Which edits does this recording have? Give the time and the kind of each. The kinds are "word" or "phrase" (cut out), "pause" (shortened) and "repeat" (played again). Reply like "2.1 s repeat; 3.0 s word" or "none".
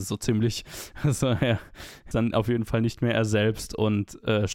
2.1 s phrase

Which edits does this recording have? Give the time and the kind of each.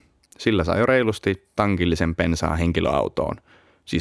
none

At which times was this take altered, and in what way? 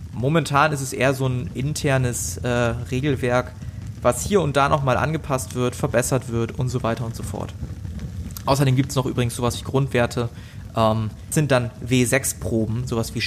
11.3 s word

